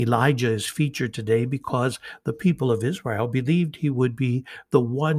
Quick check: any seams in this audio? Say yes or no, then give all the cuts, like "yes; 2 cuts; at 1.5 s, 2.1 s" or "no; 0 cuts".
no; 0 cuts